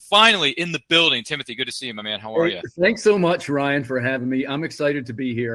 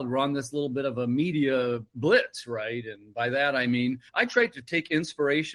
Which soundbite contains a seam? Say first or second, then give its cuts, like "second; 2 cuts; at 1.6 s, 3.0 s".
second; 1 cut; at 4.1 s